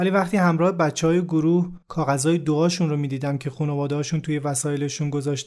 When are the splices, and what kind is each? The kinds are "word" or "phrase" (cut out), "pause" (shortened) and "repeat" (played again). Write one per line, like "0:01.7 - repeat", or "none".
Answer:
0:01.8 - pause